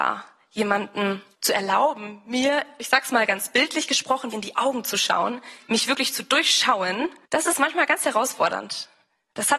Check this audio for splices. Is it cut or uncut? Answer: cut